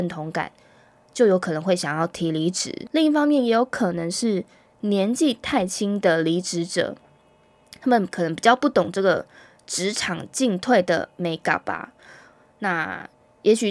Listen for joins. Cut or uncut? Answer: uncut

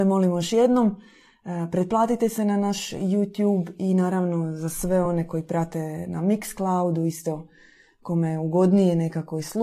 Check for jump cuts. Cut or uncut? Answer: uncut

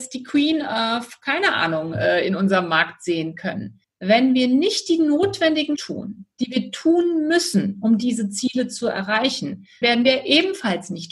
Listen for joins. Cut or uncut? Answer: cut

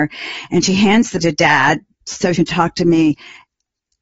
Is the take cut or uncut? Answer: cut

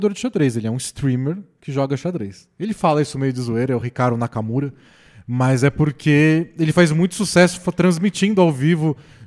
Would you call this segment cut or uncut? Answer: uncut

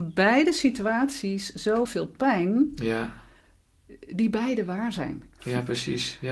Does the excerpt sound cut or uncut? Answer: cut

